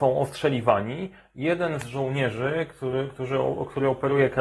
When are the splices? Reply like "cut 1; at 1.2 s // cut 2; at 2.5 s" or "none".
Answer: none